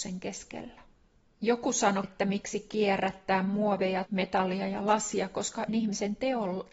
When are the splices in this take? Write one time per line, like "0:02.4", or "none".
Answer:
0:01.2
0:02.0
0:04.1
0:05.7